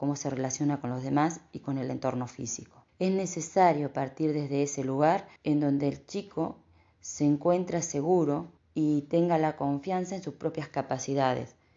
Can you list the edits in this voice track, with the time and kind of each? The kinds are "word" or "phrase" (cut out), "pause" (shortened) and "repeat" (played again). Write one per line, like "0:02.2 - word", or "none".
0:02.9 - pause
0:05.4 - pause
0:08.6 - pause